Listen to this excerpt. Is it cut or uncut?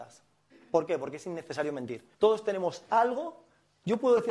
cut